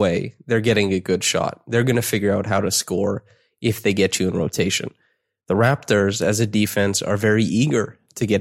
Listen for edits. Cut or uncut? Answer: uncut